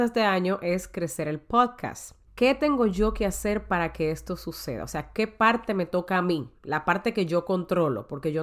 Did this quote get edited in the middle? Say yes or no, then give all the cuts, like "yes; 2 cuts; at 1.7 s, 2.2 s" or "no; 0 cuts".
yes; 2 cuts; at 2.3 s, 6.6 s